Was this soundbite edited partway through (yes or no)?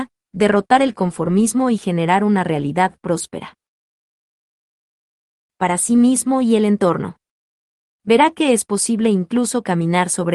no